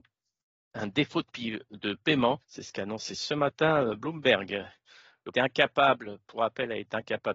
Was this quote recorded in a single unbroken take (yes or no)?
no